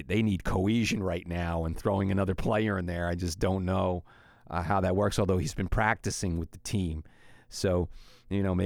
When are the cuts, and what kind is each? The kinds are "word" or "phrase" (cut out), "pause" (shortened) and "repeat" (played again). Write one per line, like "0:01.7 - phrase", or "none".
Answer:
none

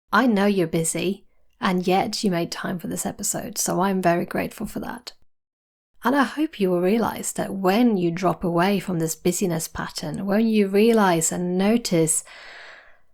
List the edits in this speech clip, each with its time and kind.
none

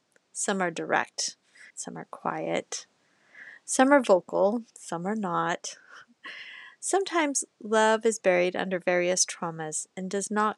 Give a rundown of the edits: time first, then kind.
0:01.7 - pause
0:04.7 - pause

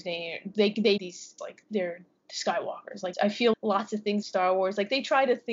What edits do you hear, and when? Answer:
0:01.0 - word
0:01.4 - word
0:03.1 - word
0:03.5 - word
0:04.2 - word

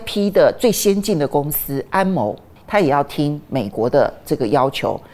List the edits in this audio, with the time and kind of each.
0:02.6 - word

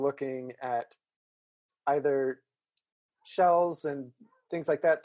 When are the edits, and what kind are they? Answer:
none

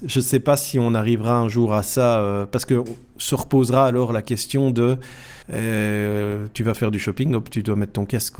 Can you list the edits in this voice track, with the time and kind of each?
0:05.4 - pause

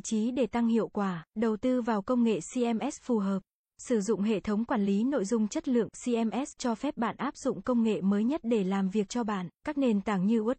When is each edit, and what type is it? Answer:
0:01.3 - pause
0:09.6 - pause

